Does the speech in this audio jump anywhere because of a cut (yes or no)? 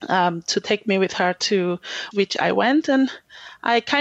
yes